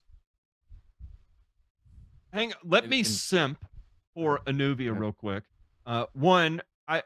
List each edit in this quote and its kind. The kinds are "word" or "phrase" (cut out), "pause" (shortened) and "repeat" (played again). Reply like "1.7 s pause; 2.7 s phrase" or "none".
none